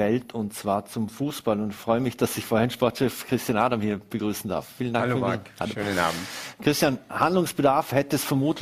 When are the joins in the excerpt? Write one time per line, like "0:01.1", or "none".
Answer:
none